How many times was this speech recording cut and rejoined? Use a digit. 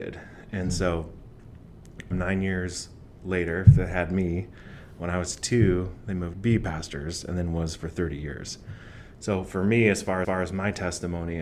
3